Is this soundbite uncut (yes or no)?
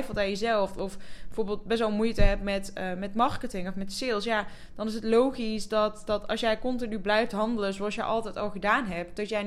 yes